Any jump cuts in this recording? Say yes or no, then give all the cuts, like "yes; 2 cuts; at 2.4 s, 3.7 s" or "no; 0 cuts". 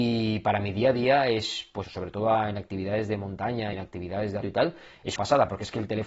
yes; 4 cuts; at 1.8 s, 3.7 s, 4.4 s, 5.2 s